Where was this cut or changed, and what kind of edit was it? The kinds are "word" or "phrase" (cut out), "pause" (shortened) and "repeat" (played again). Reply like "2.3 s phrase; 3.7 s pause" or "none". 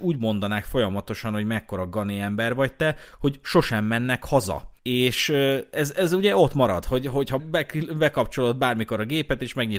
4.8 s pause; 7.4 s word

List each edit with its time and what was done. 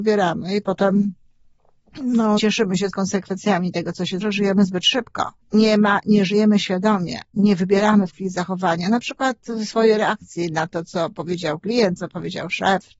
2.4 s word; 2.9 s word; 4.2 s phrase; 5.4 s pause; 8.1 s word

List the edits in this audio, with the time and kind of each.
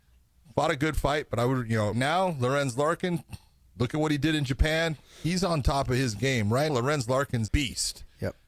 1.9 s word; 6.7 s word; 7.5 s word

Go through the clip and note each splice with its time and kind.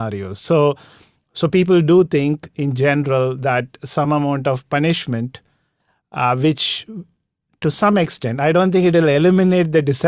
none

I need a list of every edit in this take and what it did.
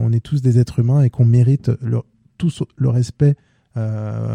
none

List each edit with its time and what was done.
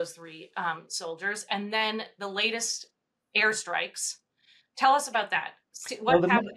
none

